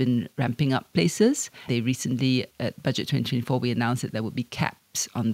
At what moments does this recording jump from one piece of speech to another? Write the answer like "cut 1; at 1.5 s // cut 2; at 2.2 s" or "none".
cut 1; at 0.9 s // cut 2; at 1.7 s // cut 3; at 2.5 s